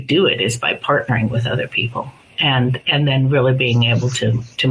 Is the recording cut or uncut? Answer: uncut